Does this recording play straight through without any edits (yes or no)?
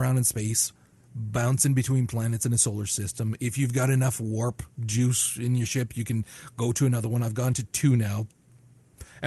no